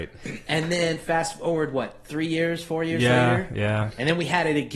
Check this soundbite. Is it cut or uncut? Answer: uncut